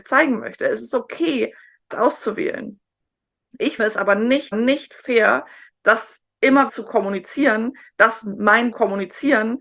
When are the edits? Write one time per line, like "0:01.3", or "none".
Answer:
0:01.9
0:03.8
0:04.5
0:06.7
0:08.7